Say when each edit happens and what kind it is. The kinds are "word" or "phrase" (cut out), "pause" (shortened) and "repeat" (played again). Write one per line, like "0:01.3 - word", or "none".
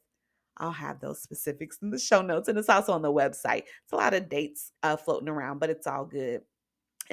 0:04.8 - pause